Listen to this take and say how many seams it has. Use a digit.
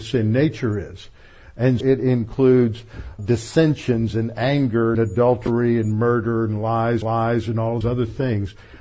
5